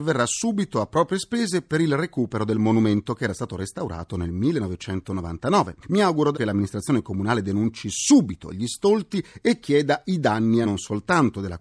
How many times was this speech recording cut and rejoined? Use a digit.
2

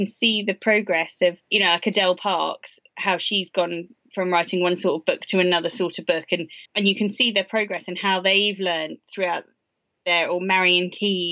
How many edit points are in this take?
2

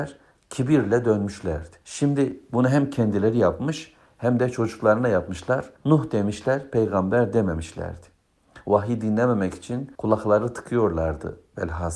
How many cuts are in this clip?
3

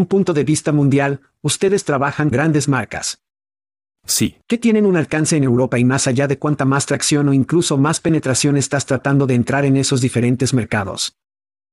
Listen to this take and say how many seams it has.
2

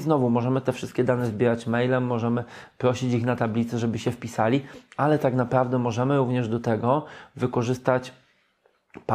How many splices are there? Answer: 0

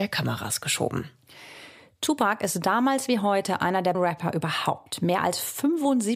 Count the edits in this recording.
1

